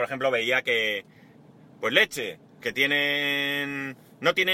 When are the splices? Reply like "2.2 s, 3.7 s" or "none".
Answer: 2.6 s